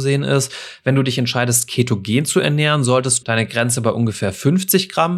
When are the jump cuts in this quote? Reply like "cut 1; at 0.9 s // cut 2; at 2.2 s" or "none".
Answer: cut 1; at 3.2 s